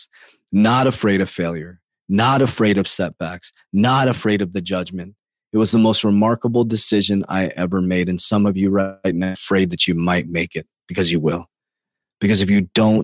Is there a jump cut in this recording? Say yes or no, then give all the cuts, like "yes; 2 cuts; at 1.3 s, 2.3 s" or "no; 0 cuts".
no; 0 cuts